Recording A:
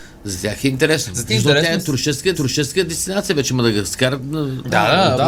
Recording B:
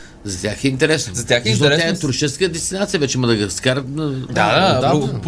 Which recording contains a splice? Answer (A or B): A